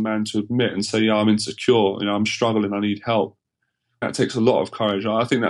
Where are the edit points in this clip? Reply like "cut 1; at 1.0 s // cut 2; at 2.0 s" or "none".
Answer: cut 1; at 4.0 s

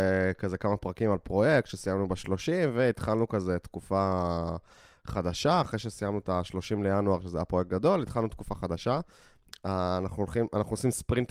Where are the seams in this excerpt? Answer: none

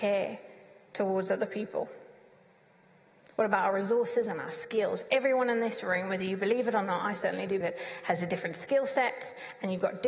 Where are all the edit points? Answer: cut 1; at 7.6 s

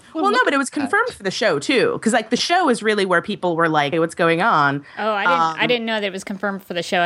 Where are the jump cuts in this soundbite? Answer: cut 1; at 3.9 s

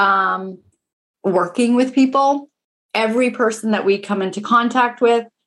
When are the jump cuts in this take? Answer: none

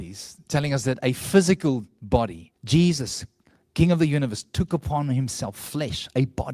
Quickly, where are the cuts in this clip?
cut 1; at 2.6 s

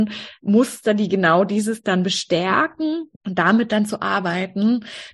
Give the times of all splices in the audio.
cut 1; at 3.2 s

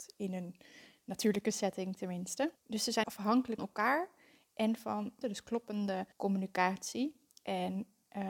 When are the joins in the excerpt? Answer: cut 1; at 2.6 s // cut 2; at 3.0 s // cut 3; at 3.6 s // cut 4; at 5.2 s // cut 5; at 6.1 s

